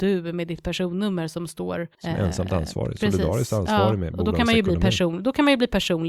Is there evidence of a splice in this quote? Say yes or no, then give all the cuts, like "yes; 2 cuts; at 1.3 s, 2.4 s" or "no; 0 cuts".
yes; 1 cut; at 1.9 s